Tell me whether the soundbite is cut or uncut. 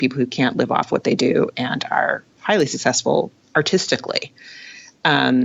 uncut